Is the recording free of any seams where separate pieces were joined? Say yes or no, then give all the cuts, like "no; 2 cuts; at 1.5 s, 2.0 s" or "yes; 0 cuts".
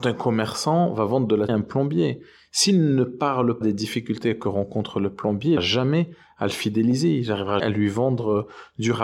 no; 4 cuts; at 1.5 s, 3.6 s, 5.6 s, 7.6 s